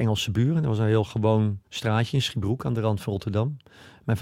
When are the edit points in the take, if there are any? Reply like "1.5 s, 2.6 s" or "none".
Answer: 1.6 s